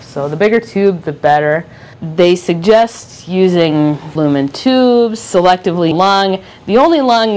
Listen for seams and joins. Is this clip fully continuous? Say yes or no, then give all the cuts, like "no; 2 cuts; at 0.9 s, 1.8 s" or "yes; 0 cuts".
no; 3 cuts; at 1.9 s, 4.2 s, 5.9 s